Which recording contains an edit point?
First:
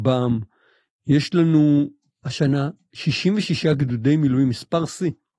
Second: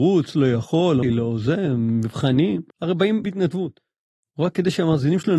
second; 3 cuts; at 1.0 s, 2.7 s, 3.2 s

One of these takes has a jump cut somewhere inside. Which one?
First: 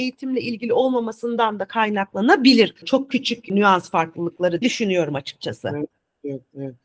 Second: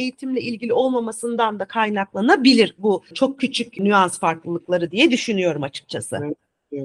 first; 2 cuts; at 2.8 s, 4.6 s

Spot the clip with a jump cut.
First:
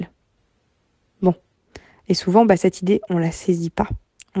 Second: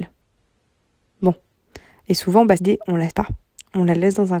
second; 2 cuts; at 2.6 s, 3.1 s

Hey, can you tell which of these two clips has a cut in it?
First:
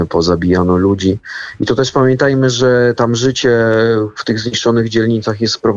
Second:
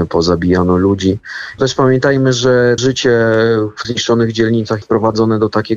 second; 4 cuts; at 1.6 s, 2.8 s, 3.8 s, 4.8 s

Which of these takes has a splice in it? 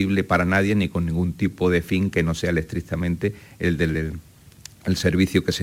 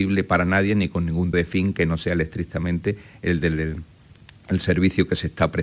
second; 1 cut; at 1.3 s

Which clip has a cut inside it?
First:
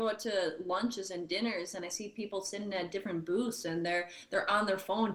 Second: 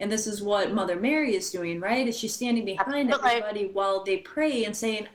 second; 1 cut; at 4.0 s

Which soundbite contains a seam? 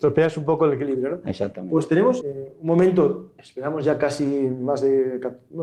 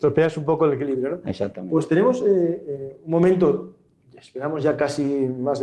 first; 2 cuts; at 2.2 s, 3.4 s

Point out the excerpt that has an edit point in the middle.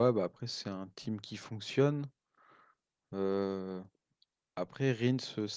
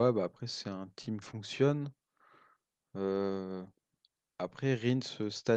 second; 1 cut; at 1.2 s

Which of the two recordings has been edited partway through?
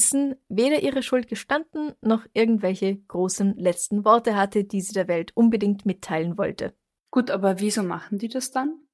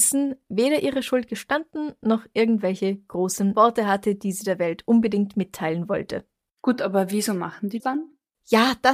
second; 2 cuts; at 3.5 s, 7.8 s

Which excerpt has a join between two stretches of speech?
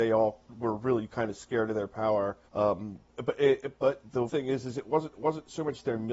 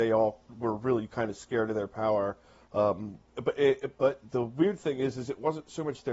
first; 3 cuts; at 2.4 s, 4.3 s, 5.1 s

